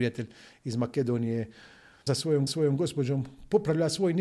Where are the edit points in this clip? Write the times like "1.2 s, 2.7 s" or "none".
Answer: 2.1 s, 2.5 s